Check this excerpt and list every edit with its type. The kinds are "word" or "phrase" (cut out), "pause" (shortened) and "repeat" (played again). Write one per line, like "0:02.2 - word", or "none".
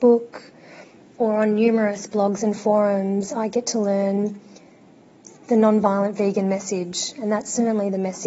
none